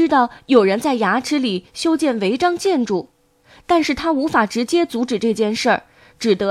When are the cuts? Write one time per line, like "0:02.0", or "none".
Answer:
none